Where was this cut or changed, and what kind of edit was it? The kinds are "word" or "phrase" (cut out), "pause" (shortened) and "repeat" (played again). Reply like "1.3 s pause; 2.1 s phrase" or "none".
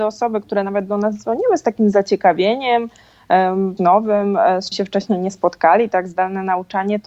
3.8 s phrase; 4.7 s word